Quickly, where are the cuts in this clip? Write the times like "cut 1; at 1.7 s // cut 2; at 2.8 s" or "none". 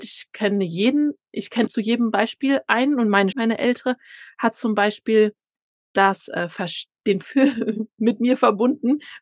cut 1; at 1.7 s // cut 2; at 3.3 s // cut 3; at 7.2 s